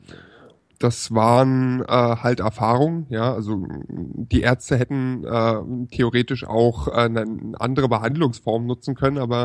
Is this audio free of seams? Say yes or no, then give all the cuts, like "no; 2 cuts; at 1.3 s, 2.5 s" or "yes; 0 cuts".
yes; 0 cuts